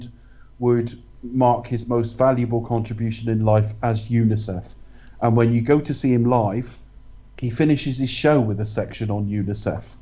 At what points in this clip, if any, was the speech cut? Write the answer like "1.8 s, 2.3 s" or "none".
1.2 s